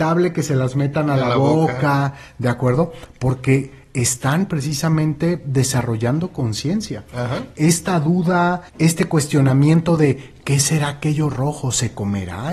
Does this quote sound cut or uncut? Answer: cut